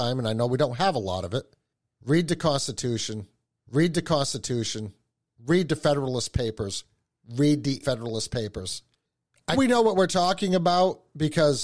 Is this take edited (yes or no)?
yes